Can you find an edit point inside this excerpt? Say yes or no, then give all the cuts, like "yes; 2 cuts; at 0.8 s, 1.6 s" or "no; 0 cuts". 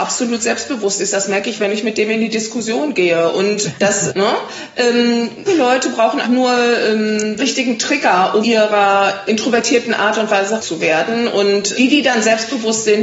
yes; 9 cuts; at 3.6 s, 4.1 s, 5.5 s, 6.2 s, 7.4 s, 8.4 s, 9.3 s, 10.6 s, 11.7 s